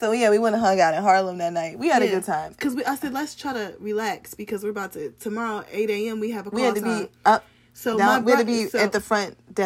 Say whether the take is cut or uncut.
uncut